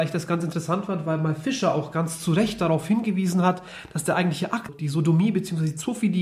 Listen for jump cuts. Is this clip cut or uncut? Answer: cut